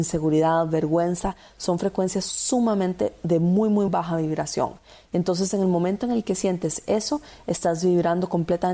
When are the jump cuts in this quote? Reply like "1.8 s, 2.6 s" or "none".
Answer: 3.9 s